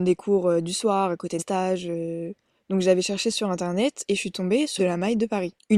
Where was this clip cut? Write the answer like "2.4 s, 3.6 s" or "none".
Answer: 1.4 s, 4.8 s